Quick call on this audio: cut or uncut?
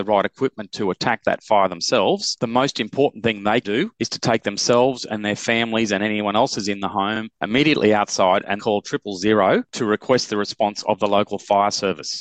cut